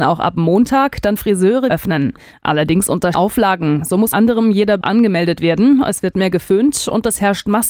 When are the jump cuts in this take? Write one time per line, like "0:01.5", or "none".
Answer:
0:01.2
0:01.7
0:03.1
0:04.1
0:04.8
0:06.1